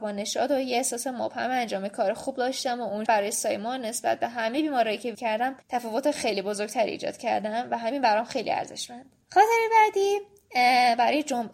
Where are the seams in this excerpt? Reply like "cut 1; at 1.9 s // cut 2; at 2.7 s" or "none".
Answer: cut 1; at 3.1 s // cut 2; at 5.1 s // cut 3; at 5.6 s // cut 4; at 9.2 s